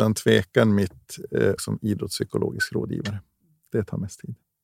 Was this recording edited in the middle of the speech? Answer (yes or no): yes